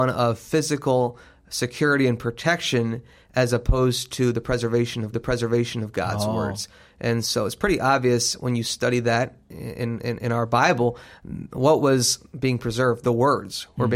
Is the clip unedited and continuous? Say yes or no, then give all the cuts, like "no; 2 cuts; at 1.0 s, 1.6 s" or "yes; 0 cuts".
no; 1 cut; at 5.1 s